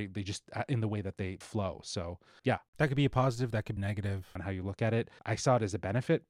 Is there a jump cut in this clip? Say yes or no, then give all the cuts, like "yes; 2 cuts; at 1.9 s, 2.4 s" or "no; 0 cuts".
yes; 5 cuts; at 1.4 s, 2.4 s, 3.8 s, 4.4 s, 5.2 s